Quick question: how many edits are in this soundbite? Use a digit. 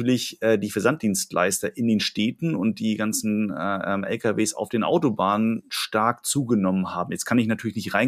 0